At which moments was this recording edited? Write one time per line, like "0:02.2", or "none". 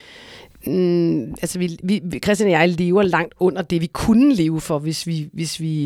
none